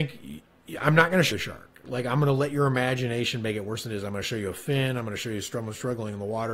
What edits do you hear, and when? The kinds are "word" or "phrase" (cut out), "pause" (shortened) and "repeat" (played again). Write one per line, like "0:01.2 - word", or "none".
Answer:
0:01.3 - word